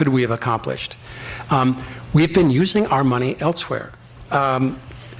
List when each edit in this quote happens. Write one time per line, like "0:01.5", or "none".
none